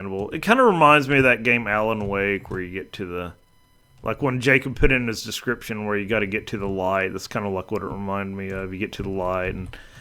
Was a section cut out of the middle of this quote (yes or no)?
no